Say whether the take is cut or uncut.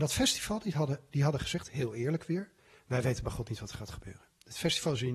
uncut